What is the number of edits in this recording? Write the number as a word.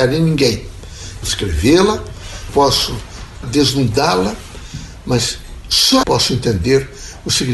four